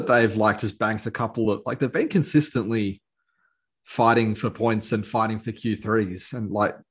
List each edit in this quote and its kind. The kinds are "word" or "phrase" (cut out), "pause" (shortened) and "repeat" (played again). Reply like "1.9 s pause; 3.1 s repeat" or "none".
none